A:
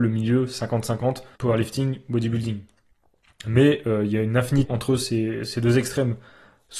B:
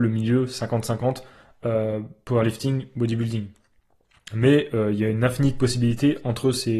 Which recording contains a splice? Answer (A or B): A